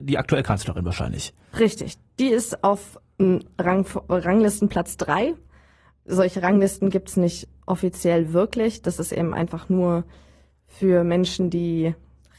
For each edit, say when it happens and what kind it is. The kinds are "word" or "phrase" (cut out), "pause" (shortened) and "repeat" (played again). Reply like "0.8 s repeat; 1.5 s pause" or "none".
none